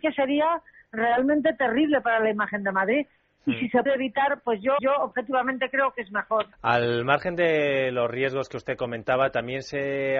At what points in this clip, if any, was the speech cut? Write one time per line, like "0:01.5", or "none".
0:03.9
0:04.8
0:06.5